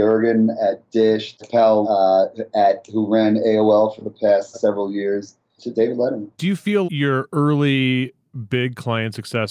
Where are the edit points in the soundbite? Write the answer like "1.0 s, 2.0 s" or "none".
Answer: 1.4 s, 1.8 s, 4.5 s, 6.3 s, 6.8 s